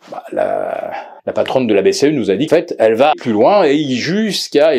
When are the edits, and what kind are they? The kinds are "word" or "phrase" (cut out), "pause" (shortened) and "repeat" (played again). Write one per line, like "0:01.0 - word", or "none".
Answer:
0:01.2 - pause
0:02.5 - word
0:03.1 - word